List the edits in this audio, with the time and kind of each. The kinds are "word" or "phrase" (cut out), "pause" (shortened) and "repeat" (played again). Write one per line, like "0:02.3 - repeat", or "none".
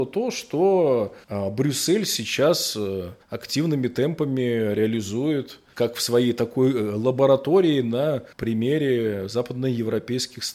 0:01.2 - pause
0:03.2 - pause
0:08.3 - pause